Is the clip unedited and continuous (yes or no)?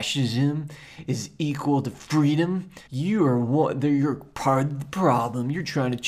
no